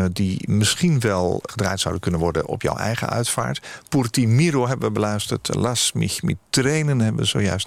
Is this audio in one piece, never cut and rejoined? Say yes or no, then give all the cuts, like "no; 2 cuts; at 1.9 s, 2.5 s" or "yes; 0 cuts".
no; 1 cut; at 1.5 s